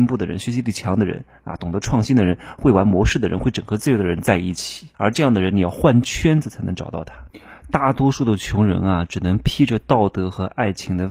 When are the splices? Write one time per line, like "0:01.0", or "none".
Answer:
0:04.9